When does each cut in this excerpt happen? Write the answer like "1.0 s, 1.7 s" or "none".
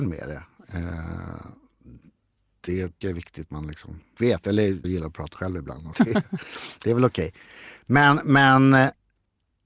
3.0 s, 3.5 s, 4.2 s, 4.8 s, 5.4 s, 5.9 s